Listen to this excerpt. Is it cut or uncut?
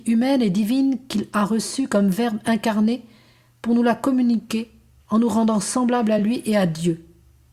uncut